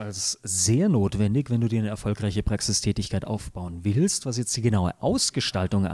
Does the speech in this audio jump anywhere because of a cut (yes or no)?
no